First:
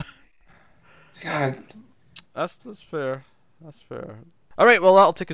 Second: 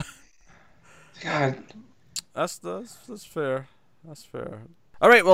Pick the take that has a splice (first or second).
first